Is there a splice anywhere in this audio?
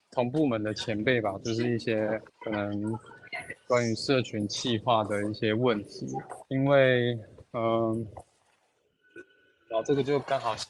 yes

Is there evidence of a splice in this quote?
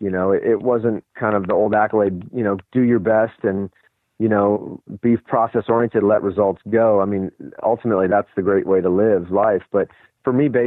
no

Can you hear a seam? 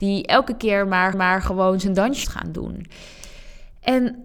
yes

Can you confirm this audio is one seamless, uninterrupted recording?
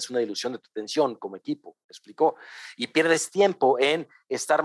yes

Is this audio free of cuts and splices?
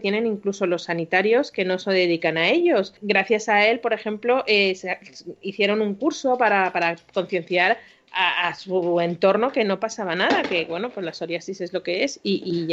no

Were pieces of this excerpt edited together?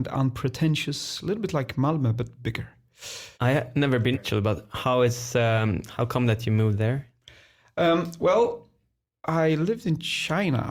yes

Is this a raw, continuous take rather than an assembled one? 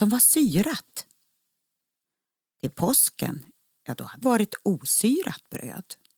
no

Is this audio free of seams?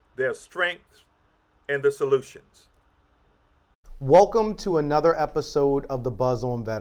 yes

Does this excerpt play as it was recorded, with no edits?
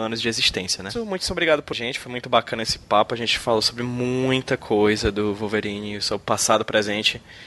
no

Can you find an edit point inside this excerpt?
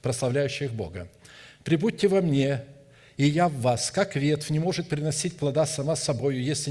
no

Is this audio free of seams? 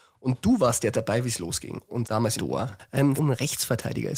no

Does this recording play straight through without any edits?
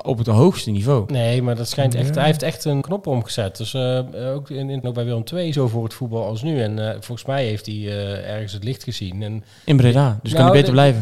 no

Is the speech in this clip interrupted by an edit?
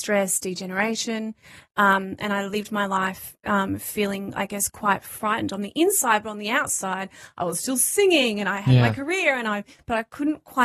no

